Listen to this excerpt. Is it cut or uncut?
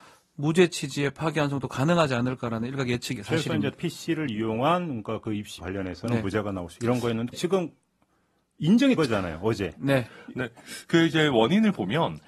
cut